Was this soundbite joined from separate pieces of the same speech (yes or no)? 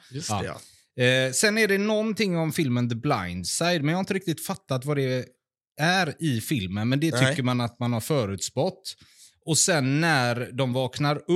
no